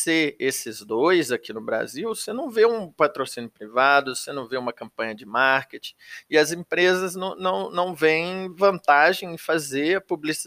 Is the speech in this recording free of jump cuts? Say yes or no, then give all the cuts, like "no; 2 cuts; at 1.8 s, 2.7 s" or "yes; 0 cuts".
yes; 0 cuts